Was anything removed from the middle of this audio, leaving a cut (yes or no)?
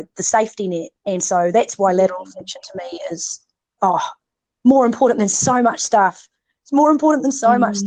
yes